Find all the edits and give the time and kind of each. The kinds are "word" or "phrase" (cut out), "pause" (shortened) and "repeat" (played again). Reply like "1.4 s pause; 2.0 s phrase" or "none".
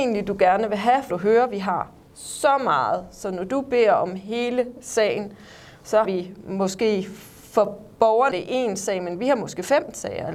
1.1 s phrase; 6.0 s word; 8.3 s word